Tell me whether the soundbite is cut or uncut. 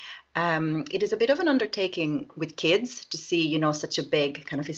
uncut